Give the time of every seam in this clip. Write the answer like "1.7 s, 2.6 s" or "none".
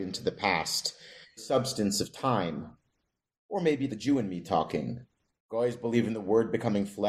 1.4 s, 3.9 s